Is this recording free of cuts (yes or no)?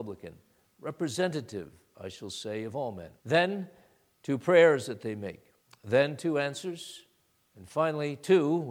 no